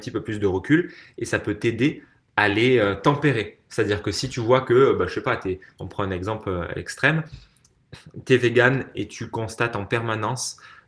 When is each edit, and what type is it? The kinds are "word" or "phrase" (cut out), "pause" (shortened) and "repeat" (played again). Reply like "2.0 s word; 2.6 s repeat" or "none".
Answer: none